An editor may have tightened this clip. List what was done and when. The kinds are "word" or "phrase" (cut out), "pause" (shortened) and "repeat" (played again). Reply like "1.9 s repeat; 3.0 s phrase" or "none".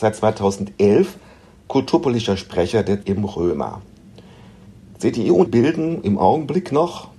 3.0 s word; 5.5 s word